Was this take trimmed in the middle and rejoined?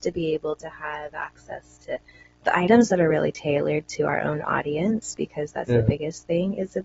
no; 0 cuts

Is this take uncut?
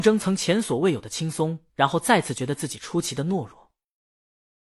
no; 1 cut; at 1.7 s

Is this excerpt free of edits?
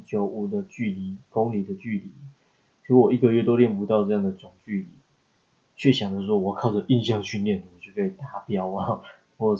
yes; 0 cuts

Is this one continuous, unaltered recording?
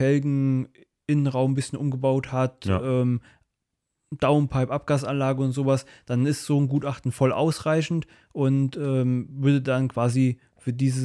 yes; 0 cuts

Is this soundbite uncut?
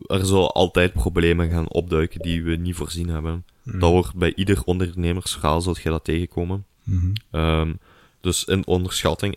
no; 1 cut; at 6.8 s

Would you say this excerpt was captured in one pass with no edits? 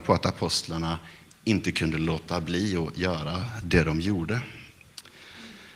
yes; 0 cuts

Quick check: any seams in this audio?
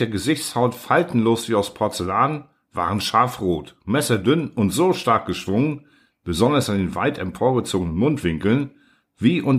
no; 0 cuts

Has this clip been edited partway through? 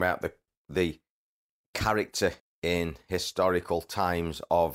yes; 2 cuts; at 1.6 s, 2.4 s

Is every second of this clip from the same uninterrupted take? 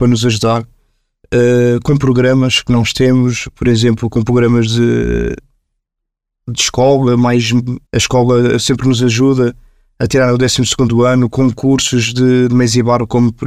no; 1 cut; at 7.9 s

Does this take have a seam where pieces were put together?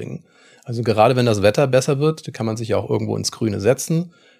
no; 0 cuts

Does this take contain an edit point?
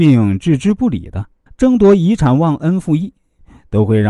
yes; 1 cut; at 1.5 s

